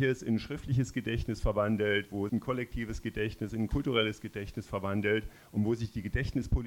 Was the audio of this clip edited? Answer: yes; 1 cut; at 2.3 s

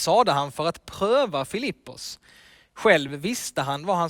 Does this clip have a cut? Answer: no; 0 cuts

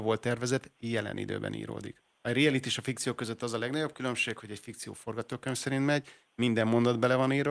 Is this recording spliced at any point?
yes; 1 cut; at 2.1 s

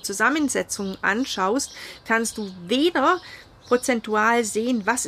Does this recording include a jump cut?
no; 0 cuts

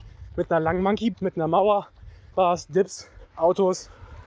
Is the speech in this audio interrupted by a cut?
yes; 3 cuts; at 1.1 s, 2.3 s, 3.3 s

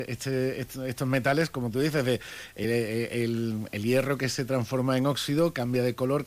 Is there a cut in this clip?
no; 0 cuts

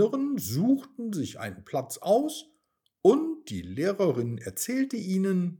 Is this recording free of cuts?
yes; 0 cuts

